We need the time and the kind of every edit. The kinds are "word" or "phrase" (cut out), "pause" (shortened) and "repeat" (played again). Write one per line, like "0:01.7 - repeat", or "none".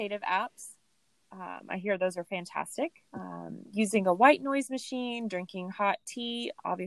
0:03.1 - pause